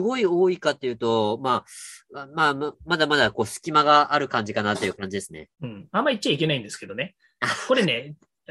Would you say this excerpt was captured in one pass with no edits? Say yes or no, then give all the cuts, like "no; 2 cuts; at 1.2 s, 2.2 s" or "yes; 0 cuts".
no; 1 cut; at 5.5 s